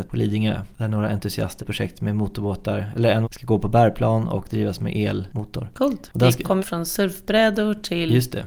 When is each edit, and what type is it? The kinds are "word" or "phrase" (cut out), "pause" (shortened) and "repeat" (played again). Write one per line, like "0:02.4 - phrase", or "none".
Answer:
0:01.6 - word
0:03.2 - phrase
0:06.6 - phrase